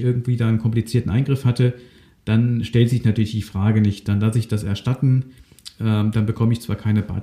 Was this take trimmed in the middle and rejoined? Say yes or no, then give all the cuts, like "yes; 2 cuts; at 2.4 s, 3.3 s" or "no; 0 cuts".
no; 0 cuts